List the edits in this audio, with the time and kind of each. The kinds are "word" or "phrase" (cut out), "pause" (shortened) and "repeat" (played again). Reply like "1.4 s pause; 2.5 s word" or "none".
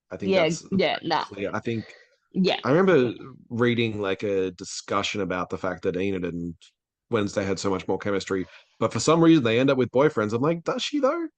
none

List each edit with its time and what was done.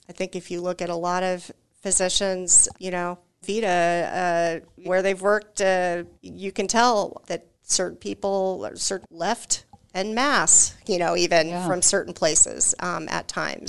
2.7 s word; 3.4 s word; 4.8 s word; 6.2 s pause; 7.2 s word; 7.5 s pause; 9.0 s phrase

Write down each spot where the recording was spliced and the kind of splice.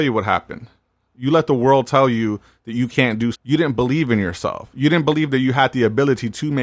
3.3 s word

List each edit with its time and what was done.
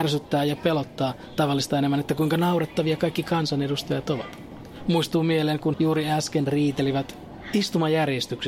5.7 s word

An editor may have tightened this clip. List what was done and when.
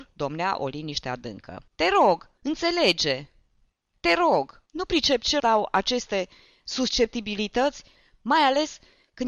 1.7 s pause; 2.4 s pause; 4.7 s pause; 5.4 s word

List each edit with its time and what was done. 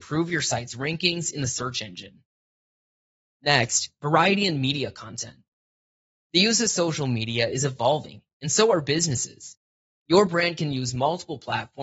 none

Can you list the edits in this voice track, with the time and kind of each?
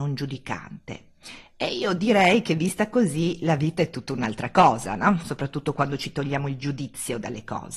none

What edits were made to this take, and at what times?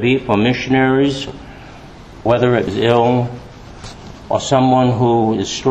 2.3 s word; 2.7 s phrase

